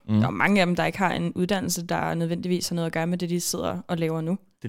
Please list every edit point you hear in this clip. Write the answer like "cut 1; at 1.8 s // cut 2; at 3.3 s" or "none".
none